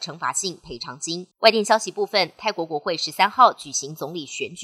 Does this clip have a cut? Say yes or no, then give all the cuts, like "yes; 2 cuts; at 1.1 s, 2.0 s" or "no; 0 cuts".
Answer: yes; 1 cut; at 1.3 s